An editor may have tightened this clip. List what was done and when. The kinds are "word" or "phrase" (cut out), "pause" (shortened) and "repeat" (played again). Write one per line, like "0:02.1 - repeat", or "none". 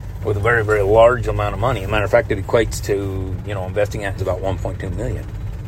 0:04.2 - phrase

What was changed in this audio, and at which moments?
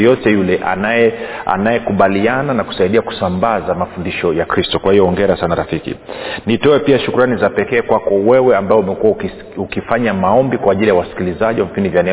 none

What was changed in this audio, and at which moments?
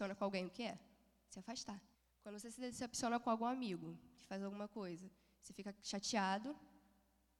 0:01.9 - pause

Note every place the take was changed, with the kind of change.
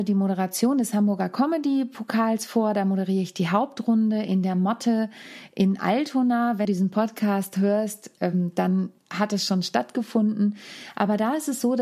0:06.6 - word
0:09.0 - pause

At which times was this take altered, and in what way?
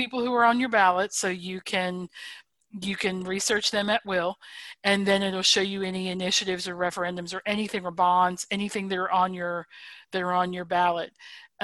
none

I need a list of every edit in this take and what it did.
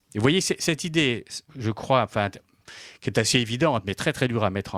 0:01.5 - pause

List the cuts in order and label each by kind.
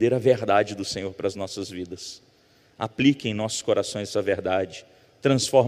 none

